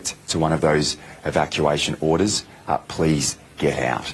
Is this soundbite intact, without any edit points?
yes; 0 cuts

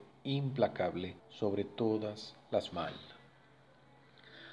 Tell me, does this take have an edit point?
yes; 2 cuts; at 1.2 s, 2.7 s

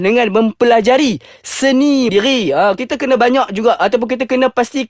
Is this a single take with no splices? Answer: no; 1 cut; at 2.1 s

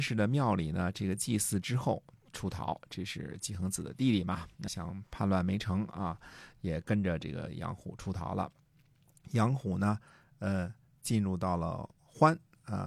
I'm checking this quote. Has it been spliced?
yes; 1 cut; at 4.7 s

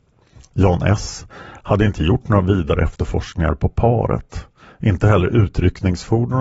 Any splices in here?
yes; 1 cut; at 4.6 s

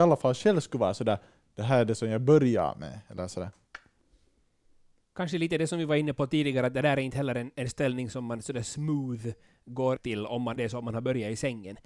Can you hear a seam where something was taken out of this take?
yes; 2 cuts; at 10.0 s, 10.6 s

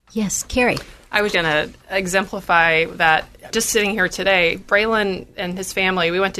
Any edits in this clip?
yes; 2 cuts; at 1.3 s, 3.5 s

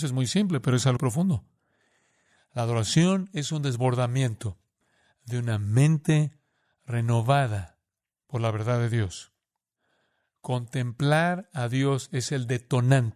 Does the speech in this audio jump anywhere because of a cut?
yes; 1 cut; at 1.0 s

